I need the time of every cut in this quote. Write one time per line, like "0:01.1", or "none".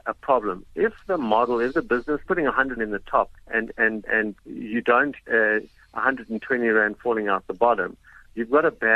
0:02.3
0:02.8
0:03.4
0:04.0
0:04.4
0:05.2